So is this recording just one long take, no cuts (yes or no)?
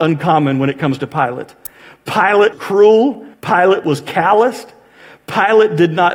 no